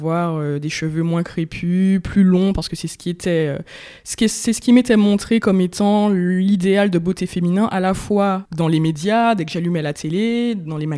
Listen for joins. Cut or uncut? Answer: uncut